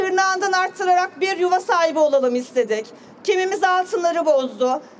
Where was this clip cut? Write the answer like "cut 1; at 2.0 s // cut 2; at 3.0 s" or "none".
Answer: none